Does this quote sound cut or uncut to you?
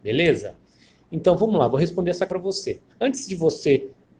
cut